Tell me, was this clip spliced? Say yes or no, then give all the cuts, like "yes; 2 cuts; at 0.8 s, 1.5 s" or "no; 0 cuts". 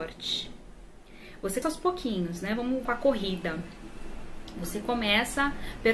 yes; 2 cuts; at 1.6 s, 2.8 s